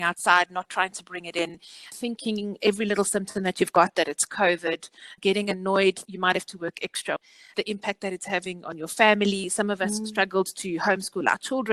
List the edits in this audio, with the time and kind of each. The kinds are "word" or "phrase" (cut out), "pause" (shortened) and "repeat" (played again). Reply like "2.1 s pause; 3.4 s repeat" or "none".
6.1 s word